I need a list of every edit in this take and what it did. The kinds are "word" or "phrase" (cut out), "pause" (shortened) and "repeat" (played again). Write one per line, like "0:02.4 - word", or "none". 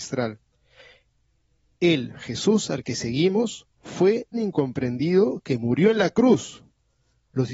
0:04.3 - word